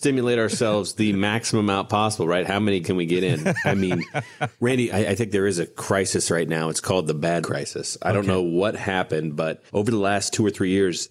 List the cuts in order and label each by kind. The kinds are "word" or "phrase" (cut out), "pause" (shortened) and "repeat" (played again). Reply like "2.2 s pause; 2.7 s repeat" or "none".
2.8 s word; 4.9 s word; 7.4 s word; 9.7 s pause